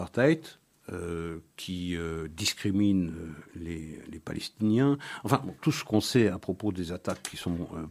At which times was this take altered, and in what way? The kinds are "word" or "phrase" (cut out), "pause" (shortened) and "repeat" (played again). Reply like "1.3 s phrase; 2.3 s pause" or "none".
5.6 s pause

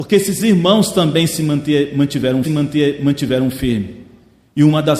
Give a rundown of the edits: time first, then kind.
2.4 s repeat

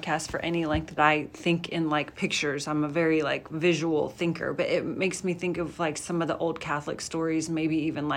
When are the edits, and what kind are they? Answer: 1.0 s phrase

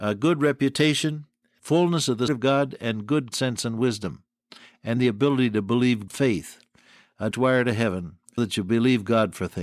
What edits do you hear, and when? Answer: 1.6 s word; 2.3 s word; 3.3 s word; 5.0 s word; 6.1 s word; 7.3 s word; 8.4 s word

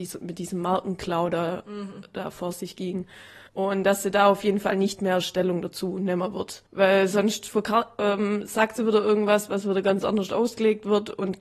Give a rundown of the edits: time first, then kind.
3.5 s pause; 6.7 s pause

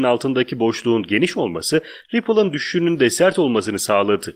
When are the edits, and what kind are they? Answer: none

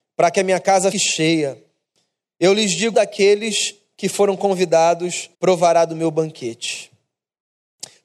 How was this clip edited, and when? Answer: 0.9 s word; 2.9 s word; 5.3 s pause

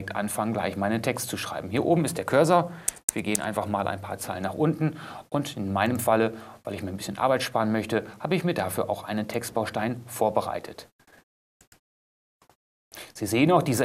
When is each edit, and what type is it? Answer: none

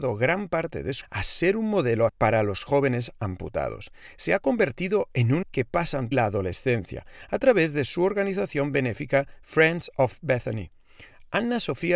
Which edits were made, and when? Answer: 1.0 s word; 2.1 s word; 5.4 s phrase; 6.1 s phrase

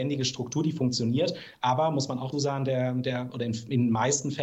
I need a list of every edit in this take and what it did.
2.3 s word

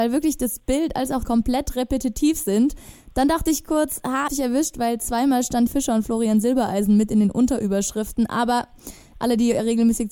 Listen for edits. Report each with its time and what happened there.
1.2 s phrase; 4.3 s phrase; 5.7 s word

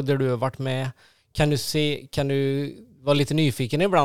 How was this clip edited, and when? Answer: none

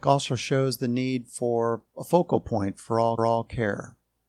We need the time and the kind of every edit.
3.2 s repeat

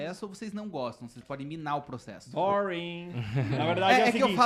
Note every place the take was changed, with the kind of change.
1.2 s word

